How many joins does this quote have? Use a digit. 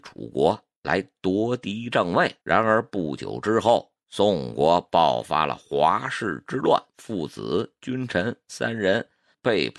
3